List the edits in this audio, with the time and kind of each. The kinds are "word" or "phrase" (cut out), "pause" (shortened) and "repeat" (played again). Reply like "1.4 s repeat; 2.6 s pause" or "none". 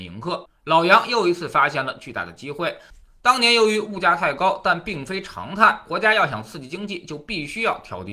none